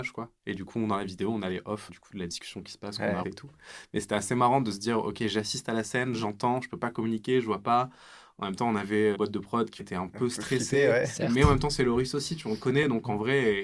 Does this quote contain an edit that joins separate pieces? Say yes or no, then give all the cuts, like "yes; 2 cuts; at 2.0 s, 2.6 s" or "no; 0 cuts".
yes; 4 cuts; at 1.9 s, 3.2 s, 9.1 s, 9.8 s